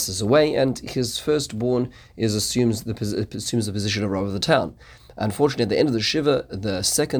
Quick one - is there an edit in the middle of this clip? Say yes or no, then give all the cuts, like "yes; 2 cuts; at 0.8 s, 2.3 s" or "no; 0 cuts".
no; 0 cuts